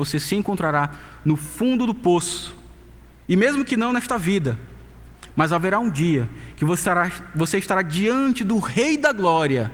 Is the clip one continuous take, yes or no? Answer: yes